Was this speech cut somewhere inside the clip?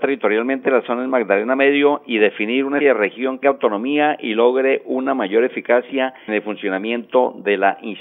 yes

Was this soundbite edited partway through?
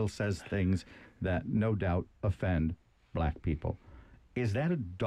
no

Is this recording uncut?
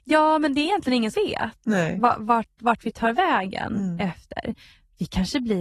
no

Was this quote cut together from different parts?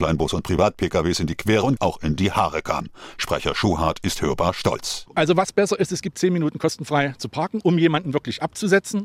yes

